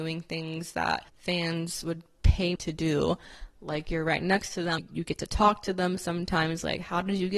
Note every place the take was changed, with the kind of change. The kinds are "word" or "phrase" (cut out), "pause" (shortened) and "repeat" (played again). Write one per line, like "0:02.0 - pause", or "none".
0:01.1 - pause
0:02.6 - word
0:04.8 - word